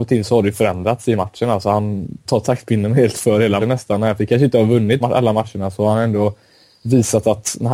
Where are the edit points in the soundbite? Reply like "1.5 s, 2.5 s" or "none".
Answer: 2.3 s, 3.1 s, 3.6 s, 4.2 s, 5.0 s